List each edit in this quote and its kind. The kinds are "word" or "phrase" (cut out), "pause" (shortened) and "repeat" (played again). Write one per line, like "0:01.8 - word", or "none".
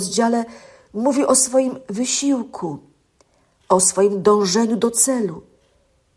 none